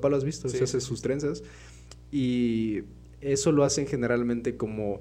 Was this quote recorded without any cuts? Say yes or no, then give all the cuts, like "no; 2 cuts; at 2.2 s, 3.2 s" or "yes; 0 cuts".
yes; 0 cuts